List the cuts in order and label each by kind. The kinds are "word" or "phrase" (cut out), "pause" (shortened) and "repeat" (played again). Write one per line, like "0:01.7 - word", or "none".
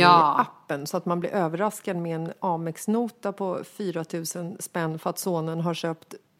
none

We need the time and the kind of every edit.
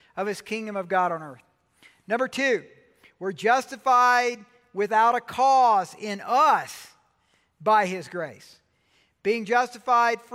none

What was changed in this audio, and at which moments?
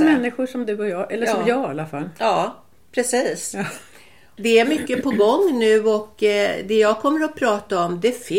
none

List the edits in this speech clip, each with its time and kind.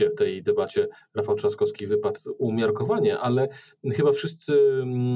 none

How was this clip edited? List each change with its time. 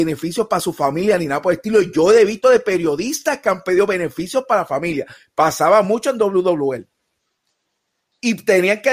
none

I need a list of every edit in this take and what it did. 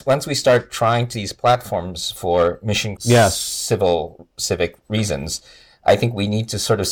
0:01.1 - word
0:03.0 - word
0:04.3 - pause

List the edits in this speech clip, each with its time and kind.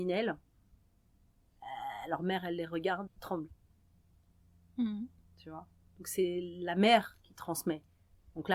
0:03.1 - word

